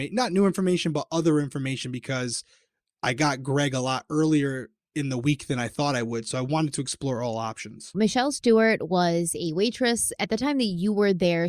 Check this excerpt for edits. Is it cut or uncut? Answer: cut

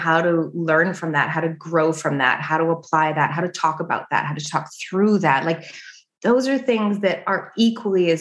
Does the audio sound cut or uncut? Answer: uncut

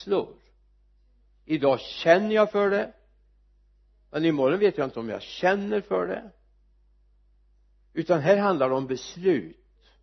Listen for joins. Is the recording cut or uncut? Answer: uncut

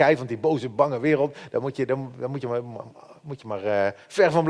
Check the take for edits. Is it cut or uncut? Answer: uncut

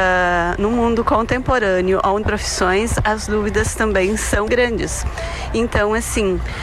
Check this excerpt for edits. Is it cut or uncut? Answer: cut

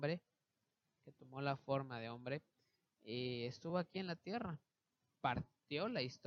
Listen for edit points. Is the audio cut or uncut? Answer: uncut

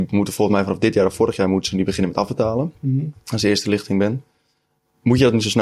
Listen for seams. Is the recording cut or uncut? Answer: uncut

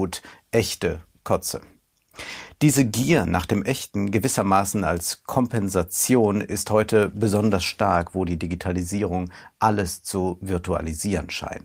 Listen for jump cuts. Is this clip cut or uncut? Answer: uncut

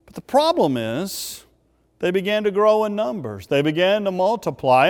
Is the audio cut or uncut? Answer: uncut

